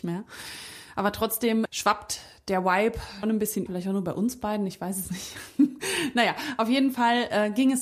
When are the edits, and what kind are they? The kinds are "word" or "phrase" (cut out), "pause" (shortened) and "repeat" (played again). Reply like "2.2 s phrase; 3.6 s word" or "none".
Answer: 1.7 s word; 3.2 s word; 3.7 s word

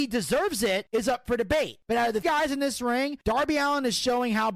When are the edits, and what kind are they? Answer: 2.2 s word

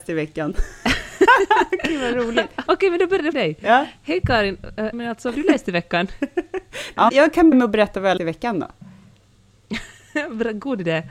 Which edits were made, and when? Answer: 2.7 s word; 3.3 s word; 4.9 s word; 5.3 s word; 7.1 s word; 7.5 s word; 8.2 s word

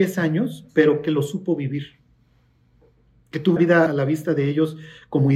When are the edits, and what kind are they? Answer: 3.6 s word; 3.9 s word

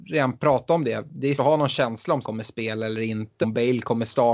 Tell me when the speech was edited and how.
1.4 s word; 2.2 s word; 3.4 s word

